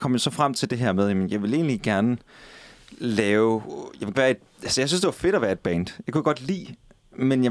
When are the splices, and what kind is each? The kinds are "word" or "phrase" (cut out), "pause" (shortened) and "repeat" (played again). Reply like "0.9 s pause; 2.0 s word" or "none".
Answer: 4.1 s word